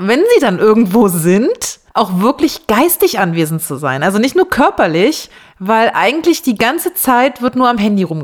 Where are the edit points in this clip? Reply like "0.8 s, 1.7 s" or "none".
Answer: 1.9 s, 5.4 s